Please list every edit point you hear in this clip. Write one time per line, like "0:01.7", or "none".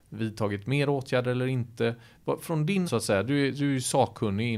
0:02.8